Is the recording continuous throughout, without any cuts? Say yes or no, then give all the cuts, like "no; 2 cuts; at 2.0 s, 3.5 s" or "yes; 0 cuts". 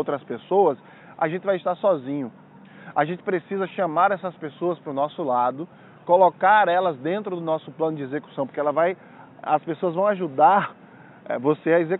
yes; 0 cuts